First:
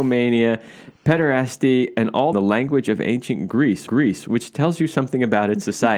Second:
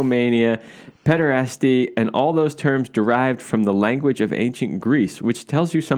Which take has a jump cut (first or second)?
first